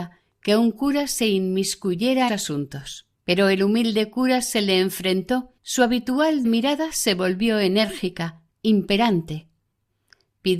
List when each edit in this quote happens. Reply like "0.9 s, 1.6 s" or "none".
2.3 s, 3.1 s, 5.6 s, 6.4 s